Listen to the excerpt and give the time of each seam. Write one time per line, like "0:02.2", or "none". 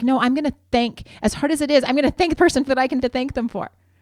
0:02.4
0:02.7
0:03.0